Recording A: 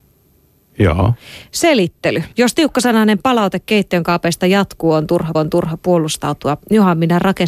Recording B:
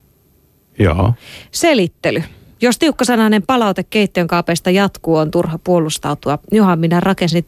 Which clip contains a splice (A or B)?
A